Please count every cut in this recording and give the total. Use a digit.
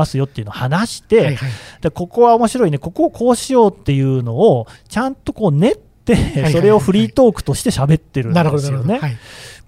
1